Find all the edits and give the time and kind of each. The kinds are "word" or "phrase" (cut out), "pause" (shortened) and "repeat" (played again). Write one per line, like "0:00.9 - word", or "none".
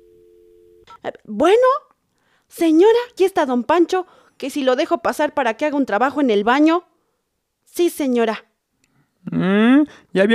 0:03.2 - word